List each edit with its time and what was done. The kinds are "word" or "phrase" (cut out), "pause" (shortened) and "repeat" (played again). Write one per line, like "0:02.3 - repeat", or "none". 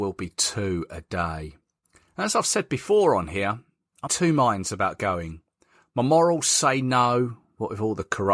0:04.1 - word